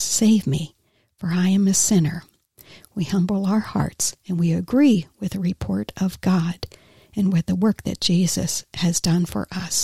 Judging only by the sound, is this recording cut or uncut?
uncut